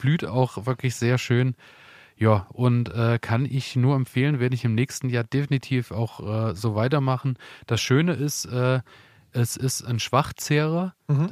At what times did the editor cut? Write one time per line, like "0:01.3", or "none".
none